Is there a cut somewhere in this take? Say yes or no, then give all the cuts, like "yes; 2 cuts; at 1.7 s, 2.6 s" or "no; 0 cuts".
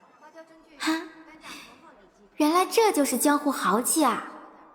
no; 0 cuts